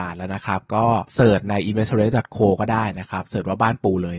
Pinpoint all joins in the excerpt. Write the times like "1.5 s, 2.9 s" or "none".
1.1 s